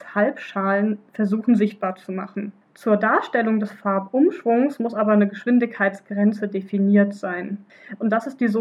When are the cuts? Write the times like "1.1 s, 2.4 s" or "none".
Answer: 1.1 s, 2.6 s